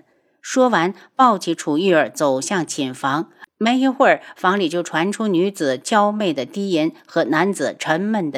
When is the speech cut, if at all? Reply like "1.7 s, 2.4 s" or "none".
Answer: 3.5 s